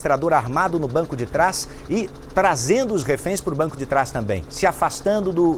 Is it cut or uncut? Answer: uncut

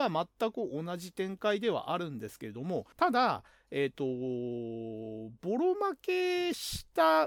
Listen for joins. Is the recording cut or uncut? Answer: cut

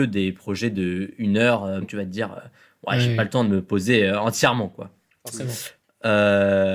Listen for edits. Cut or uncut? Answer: cut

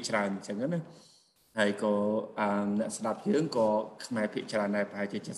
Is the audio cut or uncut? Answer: uncut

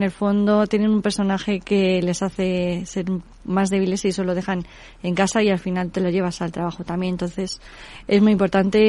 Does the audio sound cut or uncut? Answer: uncut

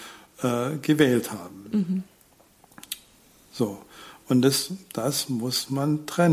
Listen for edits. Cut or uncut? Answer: uncut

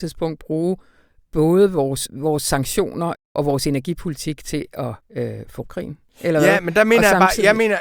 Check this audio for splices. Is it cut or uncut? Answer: cut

